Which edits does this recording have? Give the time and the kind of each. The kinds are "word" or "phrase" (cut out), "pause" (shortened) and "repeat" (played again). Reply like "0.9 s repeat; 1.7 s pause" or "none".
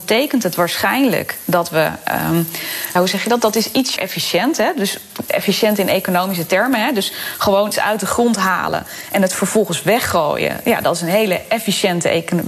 3.0 s word; 4.0 s word; 5.3 s phrase; 7.7 s word